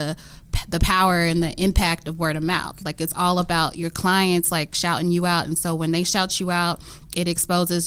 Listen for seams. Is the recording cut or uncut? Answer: uncut